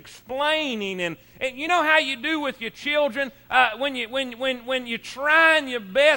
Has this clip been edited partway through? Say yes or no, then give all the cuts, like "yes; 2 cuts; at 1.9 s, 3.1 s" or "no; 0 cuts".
no; 0 cuts